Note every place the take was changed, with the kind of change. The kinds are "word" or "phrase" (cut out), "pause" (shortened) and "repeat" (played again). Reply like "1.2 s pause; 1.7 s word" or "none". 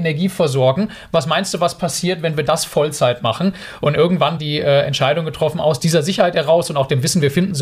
4.4 s word